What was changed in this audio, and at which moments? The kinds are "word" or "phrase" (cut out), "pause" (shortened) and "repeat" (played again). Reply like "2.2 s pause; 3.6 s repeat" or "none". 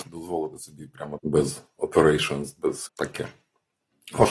1.2 s word; 2.9 s word